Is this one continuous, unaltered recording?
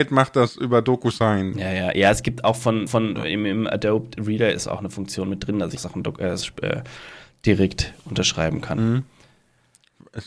no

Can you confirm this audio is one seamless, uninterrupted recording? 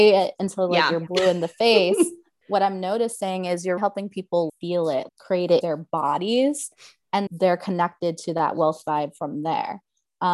no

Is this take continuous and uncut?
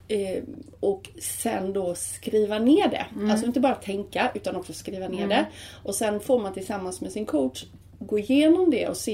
yes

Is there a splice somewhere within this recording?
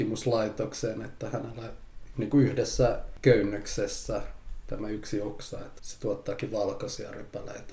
yes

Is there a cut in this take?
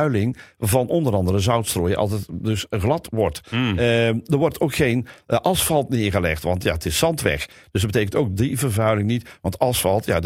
no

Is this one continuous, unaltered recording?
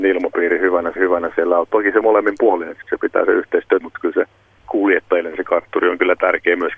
no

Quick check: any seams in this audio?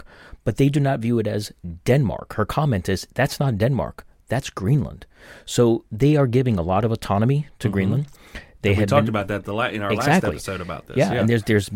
no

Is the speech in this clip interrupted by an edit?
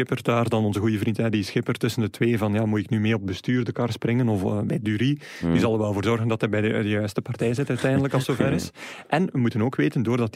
no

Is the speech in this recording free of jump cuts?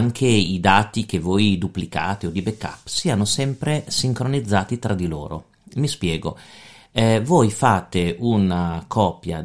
yes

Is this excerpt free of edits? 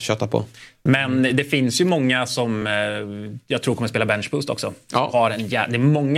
yes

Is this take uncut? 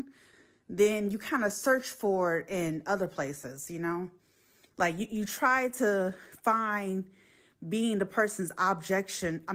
yes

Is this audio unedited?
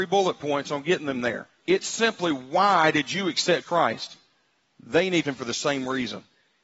no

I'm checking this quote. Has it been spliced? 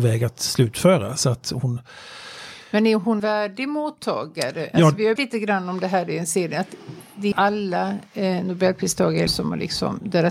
yes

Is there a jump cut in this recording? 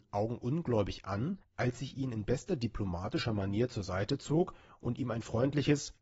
no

